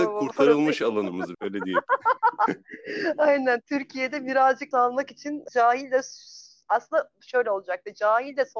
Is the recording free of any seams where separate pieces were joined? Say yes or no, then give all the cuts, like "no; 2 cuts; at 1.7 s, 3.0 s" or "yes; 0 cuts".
no; 3 cuts; at 1.3 s, 4.7 s, 5.5 s